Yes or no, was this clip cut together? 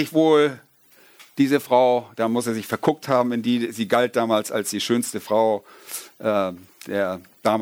no